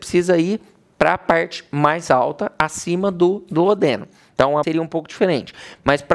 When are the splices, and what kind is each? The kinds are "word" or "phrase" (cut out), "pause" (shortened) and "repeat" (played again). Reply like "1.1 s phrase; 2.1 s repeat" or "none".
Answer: 4.6 s word